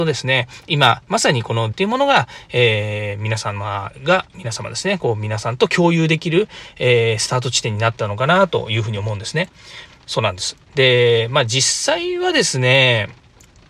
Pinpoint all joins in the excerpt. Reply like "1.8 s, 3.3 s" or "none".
1.7 s, 4.3 s, 10.0 s, 10.6 s